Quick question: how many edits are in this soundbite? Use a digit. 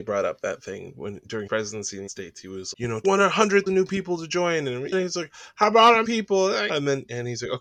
8